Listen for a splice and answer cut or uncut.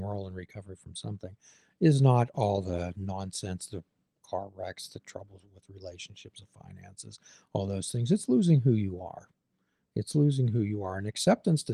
uncut